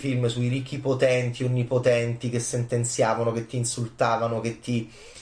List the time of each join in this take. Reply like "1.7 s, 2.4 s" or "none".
none

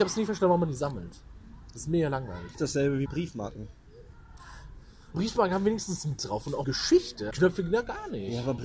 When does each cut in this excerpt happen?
2.5 s, 3.1 s, 5.1 s, 6.2 s, 6.6 s, 7.3 s

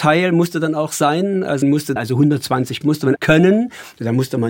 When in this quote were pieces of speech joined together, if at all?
1.6 s, 2.0 s, 2.8 s, 3.2 s

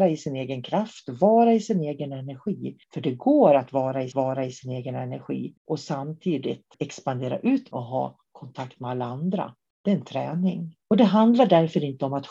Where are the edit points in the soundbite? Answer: 2.8 s, 4.1 s, 5.6 s, 6.7 s, 7.7 s, 10.8 s

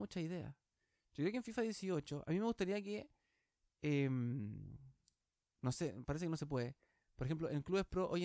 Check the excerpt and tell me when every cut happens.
none

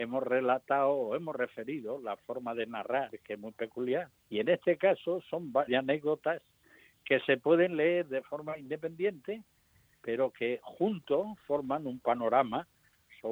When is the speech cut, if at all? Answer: 4.2 s, 5.7 s

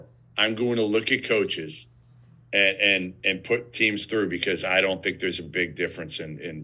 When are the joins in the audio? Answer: none

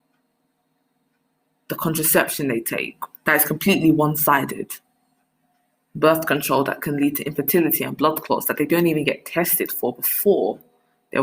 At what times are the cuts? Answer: 3.2 s, 5.3 s

